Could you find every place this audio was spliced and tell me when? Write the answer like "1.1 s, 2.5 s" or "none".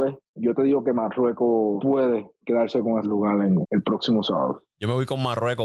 3.0 s, 3.6 s